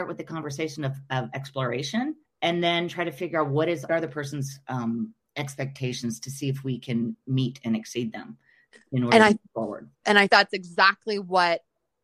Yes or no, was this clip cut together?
yes